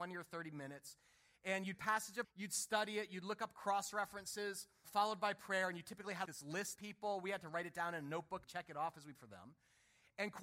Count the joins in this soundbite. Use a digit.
7